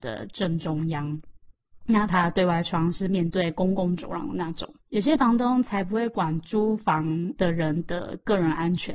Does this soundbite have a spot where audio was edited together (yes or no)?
yes